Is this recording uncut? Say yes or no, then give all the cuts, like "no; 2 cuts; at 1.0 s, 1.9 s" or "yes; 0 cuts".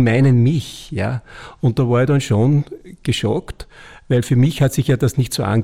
yes; 0 cuts